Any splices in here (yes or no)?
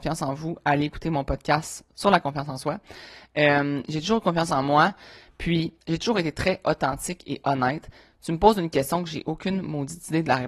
yes